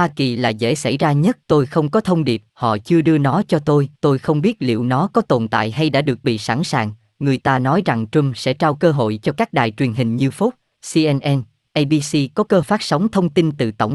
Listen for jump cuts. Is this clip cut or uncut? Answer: cut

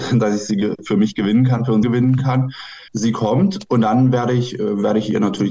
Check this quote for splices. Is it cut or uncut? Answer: cut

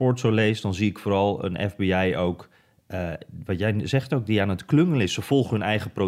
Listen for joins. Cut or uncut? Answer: uncut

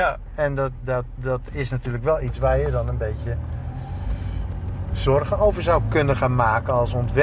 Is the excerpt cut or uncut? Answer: uncut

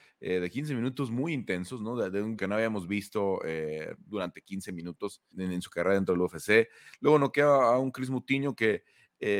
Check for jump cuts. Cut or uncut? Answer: cut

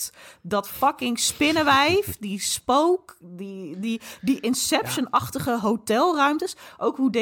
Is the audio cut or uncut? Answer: uncut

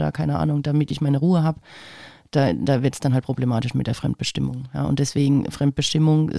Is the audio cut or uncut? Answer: uncut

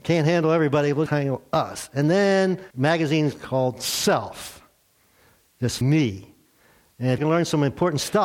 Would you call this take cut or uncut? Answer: cut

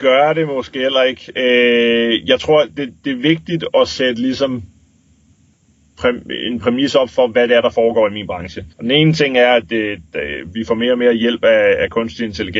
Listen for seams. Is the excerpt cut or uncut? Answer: cut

